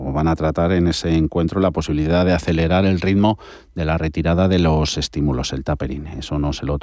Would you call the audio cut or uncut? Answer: uncut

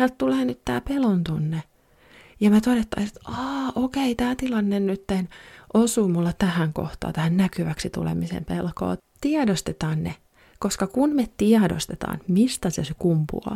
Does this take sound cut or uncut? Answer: uncut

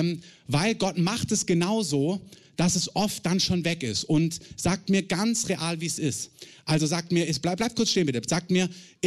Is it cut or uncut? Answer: uncut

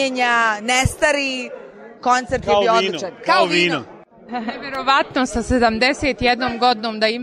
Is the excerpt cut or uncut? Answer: uncut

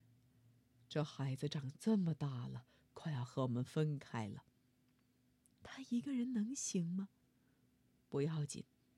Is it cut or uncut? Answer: uncut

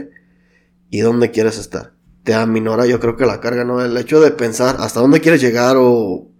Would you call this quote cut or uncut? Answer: cut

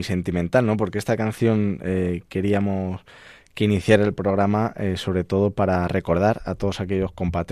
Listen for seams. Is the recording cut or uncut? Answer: uncut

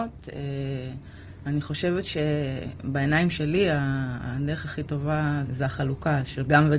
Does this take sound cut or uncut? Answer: cut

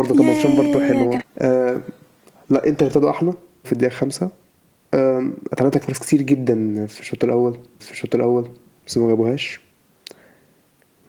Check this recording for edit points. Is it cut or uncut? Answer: cut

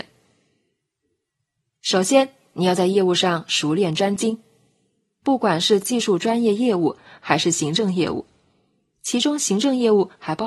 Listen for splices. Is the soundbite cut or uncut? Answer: uncut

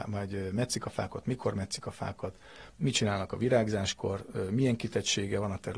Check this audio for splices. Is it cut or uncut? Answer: uncut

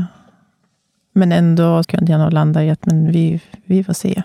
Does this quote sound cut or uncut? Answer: cut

